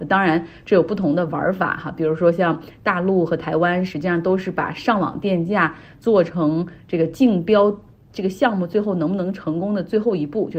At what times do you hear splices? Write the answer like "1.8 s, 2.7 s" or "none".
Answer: none